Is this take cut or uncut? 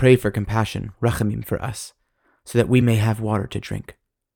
uncut